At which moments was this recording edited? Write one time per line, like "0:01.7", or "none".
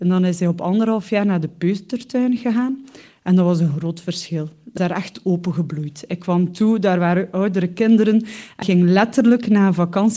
0:04.8
0:08.6